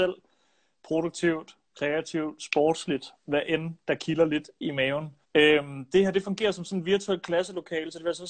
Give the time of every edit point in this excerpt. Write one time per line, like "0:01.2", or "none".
0:05.2

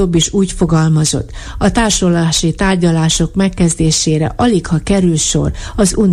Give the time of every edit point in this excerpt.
none

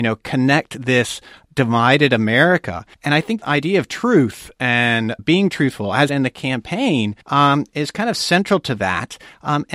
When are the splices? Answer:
0:01.5
0:02.9
0:03.4
0:05.2
0:06.1
0:07.2

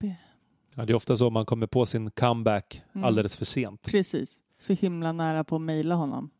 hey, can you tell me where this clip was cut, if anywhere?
0:04.5

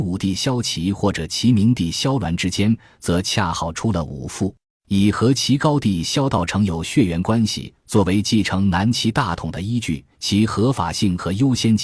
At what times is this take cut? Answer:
0:04.6
0:10.1

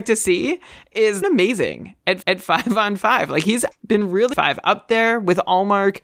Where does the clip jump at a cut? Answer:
0:01.2
0:02.2
0:03.7
0:04.3

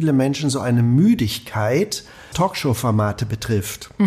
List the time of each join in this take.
0:02.3

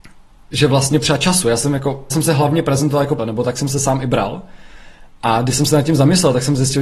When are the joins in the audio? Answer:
0:01.0
0:02.1
0:03.2

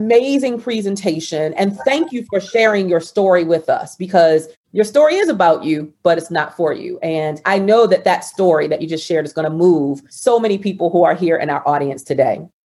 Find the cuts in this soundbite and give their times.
none

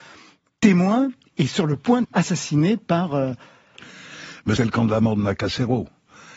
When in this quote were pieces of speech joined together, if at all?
0:02.0
0:04.6

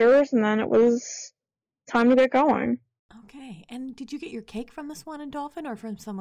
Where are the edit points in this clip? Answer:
none

